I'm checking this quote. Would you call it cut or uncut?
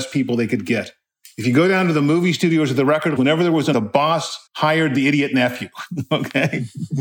cut